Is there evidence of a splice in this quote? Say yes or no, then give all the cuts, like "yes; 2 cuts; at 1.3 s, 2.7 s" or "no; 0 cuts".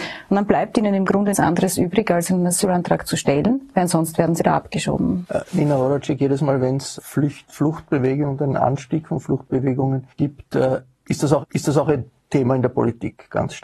yes; 5 cuts; at 1.3 s, 4.4 s, 7.0 s, 10.1 s, 11.4 s